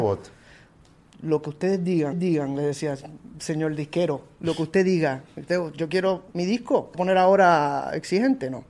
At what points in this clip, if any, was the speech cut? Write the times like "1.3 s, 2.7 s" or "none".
2.1 s, 6.3 s, 6.9 s